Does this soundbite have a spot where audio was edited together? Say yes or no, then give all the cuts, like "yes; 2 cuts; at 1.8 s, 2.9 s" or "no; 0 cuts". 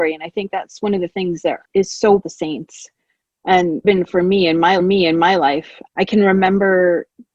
yes; 4 cuts; at 1.6 s, 2.2 s, 3.8 s, 4.8 s